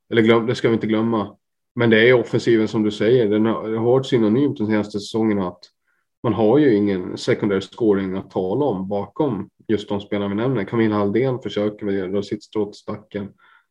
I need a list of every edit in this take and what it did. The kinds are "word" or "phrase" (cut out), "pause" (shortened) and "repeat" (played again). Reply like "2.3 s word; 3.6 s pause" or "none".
none